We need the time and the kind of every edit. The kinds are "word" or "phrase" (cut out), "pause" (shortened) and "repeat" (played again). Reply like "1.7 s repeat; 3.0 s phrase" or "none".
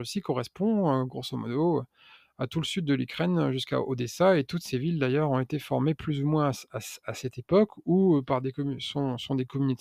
none